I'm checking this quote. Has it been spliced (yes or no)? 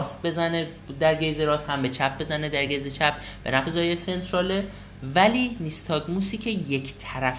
no